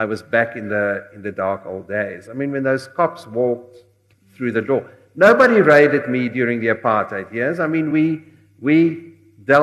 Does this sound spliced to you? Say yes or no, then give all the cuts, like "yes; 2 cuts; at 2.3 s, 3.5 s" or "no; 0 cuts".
no; 0 cuts